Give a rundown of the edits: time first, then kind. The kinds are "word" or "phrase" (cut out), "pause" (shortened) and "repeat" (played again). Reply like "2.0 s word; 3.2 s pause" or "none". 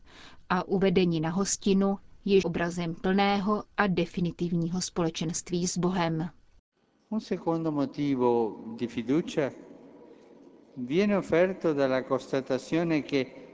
2.4 s word